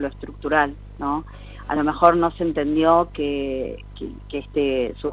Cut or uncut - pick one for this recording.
uncut